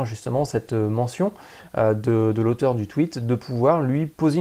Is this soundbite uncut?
yes; 0 cuts

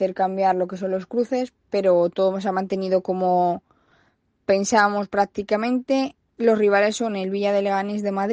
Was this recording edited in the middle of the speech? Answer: no; 0 cuts

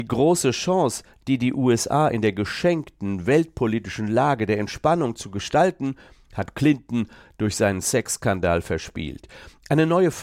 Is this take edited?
no; 0 cuts

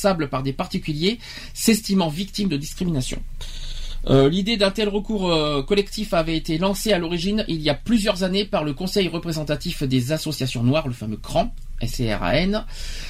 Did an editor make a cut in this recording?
no; 0 cuts

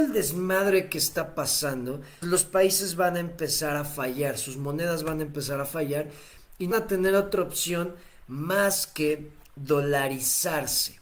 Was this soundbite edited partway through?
yes; 2 cuts; at 2.2 s, 6.7 s

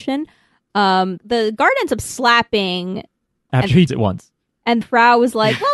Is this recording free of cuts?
no; 4 cuts; at 1.2 s, 3.5 s, 3.9 s, 4.8 s

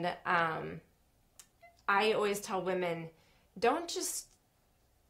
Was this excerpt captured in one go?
yes; 0 cuts

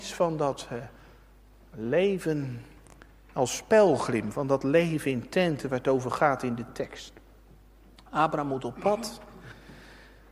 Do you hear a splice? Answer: no; 0 cuts

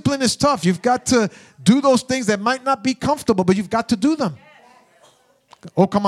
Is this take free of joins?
yes; 0 cuts

